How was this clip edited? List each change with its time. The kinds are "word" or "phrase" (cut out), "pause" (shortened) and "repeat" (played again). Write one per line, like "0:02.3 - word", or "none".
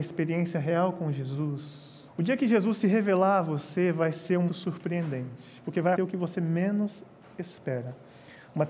0:02.1 - pause
0:04.5 - word
0:06.0 - word